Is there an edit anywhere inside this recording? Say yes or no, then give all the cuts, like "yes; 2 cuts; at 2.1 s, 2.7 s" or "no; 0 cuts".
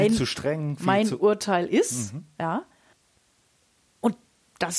no; 0 cuts